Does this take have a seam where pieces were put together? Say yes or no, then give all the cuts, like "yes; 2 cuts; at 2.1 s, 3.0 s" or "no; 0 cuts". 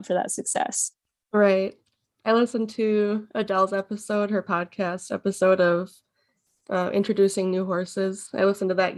no; 0 cuts